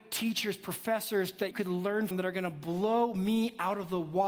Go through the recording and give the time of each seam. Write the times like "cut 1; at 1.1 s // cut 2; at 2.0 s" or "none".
cut 1; at 1.5 s // cut 2; at 2.1 s